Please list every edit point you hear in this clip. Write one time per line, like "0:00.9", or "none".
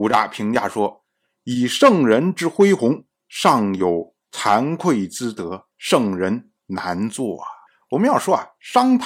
0:05.7
0:07.7